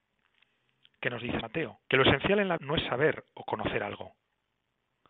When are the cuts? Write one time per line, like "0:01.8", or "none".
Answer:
0:01.4
0:01.8
0:02.6

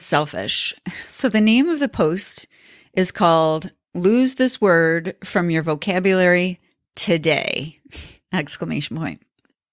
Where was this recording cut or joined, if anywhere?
none

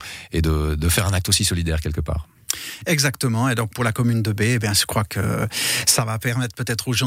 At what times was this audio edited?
none

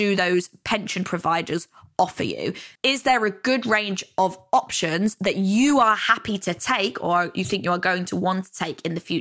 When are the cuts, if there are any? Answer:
0:02.8

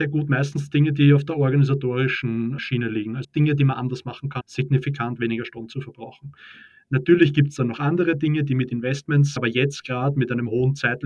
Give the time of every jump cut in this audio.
0:02.6
0:03.2
0:04.4
0:09.4

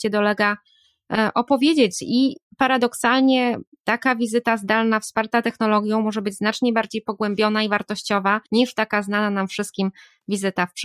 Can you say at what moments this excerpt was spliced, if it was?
0:08.5

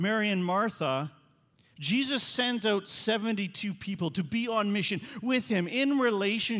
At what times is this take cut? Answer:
none

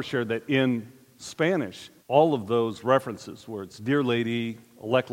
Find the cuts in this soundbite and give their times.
0:02.0

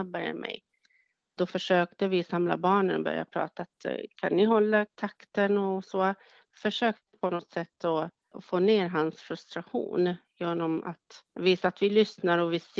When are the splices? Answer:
0:11.3

